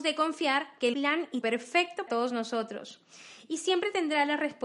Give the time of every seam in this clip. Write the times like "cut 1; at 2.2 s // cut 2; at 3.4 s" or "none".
cut 1; at 0.9 s // cut 2; at 1.4 s // cut 3; at 2.1 s